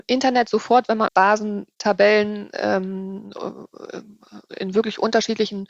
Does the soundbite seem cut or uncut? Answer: cut